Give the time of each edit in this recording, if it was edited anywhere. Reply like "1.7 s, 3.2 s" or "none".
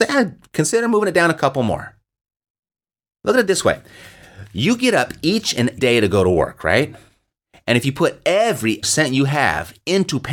5.8 s, 8.8 s